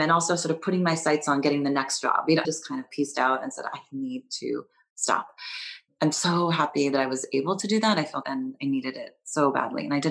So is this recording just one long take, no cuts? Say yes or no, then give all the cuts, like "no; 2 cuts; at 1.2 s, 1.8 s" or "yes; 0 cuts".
no; 2 cuts; at 2.4 s, 8.2 s